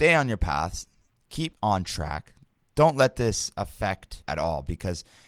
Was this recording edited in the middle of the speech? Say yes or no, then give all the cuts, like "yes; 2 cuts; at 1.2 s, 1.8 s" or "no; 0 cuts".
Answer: yes; 1 cut; at 4.3 s